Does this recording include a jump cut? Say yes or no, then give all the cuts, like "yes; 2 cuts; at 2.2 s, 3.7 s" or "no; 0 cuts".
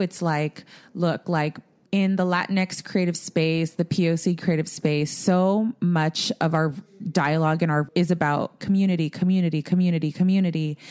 yes; 3 cuts; at 1.8 s, 7.8 s, 8.6 s